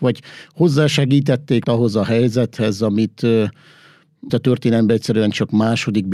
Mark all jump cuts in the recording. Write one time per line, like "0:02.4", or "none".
0:01.6
0:04.3